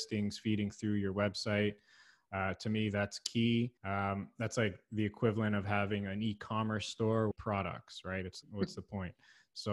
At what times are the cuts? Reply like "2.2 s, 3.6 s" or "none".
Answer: 3.8 s, 7.3 s, 8.4 s